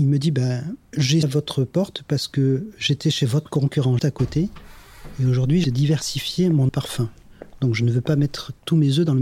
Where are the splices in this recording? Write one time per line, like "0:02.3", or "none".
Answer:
0:01.2
0:04.0
0:05.6
0:06.7